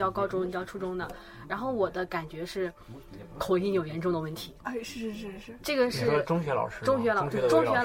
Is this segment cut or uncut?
uncut